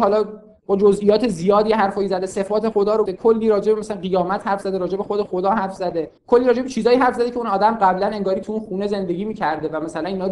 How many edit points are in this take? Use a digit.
2